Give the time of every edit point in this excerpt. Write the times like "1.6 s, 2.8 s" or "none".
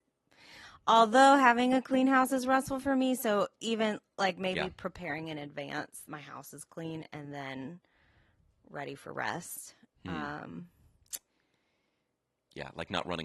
6.1 s